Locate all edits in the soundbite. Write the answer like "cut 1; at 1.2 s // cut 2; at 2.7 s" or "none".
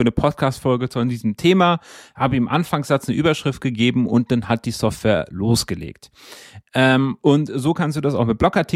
none